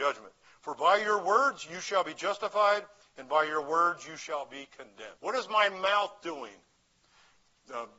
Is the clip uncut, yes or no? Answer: no